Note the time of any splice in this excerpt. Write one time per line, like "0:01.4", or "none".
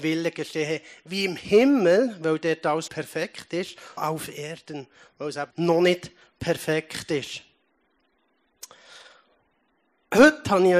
0:02.9
0:04.0
0:05.5

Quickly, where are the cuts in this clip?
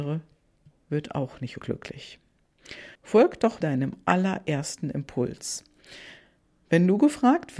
0:01.6
0:02.9
0:03.6

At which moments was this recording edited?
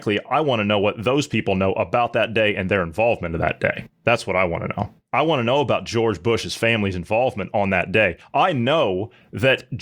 none

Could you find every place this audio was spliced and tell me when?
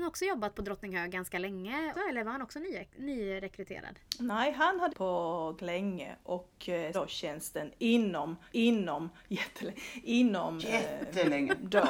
0:01.9
0:04.9
0:05.6
0:06.9
0:08.5
0:10.6

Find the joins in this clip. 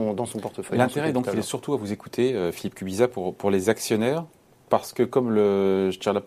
none

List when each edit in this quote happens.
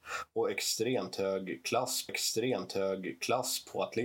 0:02.1

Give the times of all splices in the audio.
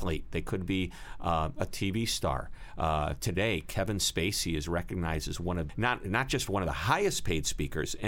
0:05.7

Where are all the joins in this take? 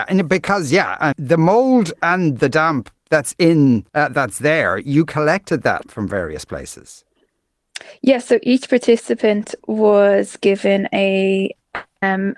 0:01.1
0:03.9
0:05.8

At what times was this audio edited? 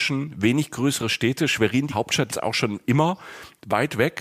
0:01.9
0:02.3

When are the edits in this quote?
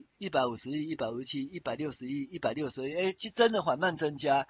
none

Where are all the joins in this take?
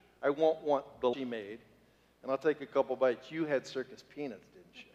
0:01.1

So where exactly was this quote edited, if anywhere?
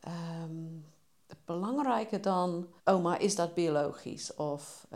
0:02.8

